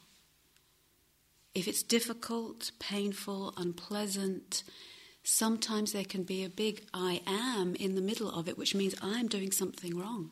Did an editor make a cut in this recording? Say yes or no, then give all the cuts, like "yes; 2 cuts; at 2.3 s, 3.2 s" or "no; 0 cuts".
no; 0 cuts